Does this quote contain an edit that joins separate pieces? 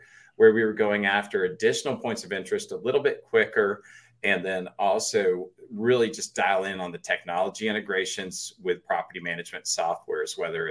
no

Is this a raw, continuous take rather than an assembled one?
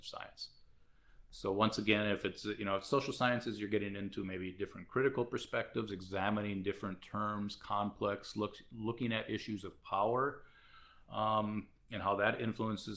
yes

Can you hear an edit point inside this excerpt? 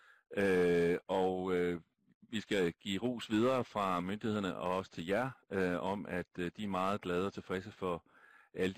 no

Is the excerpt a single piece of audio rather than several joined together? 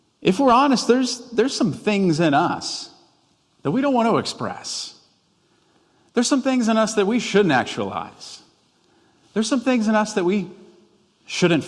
yes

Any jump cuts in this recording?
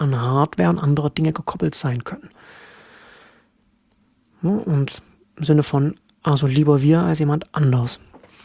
no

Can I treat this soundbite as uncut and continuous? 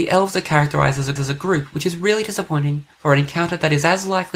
no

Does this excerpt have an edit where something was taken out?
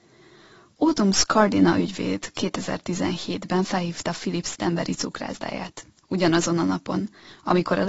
yes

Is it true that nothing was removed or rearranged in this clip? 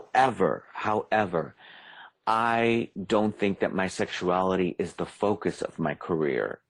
yes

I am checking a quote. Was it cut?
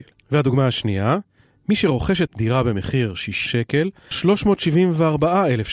yes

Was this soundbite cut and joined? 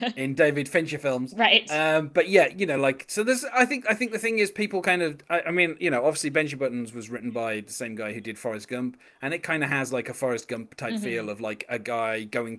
no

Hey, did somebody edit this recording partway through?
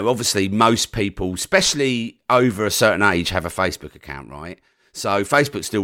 no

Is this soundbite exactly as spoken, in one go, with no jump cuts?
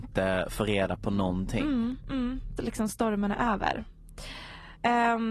no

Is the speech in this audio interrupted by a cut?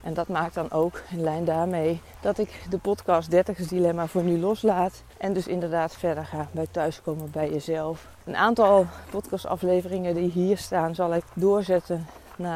no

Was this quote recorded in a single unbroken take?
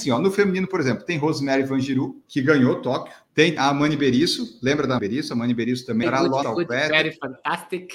no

